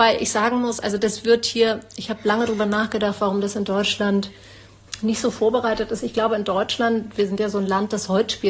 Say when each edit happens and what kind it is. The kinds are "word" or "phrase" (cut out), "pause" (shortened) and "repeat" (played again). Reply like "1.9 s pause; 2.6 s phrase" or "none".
none